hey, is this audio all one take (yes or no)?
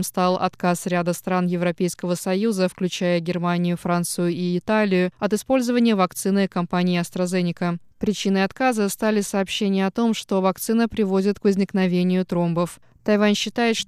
yes